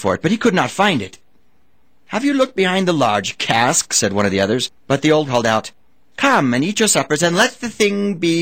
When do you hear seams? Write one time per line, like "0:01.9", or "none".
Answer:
0:04.8
0:05.3